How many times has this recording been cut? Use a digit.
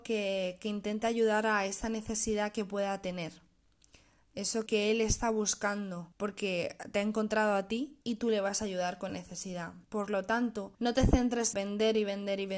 7